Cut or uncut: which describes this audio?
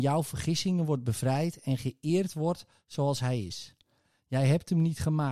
uncut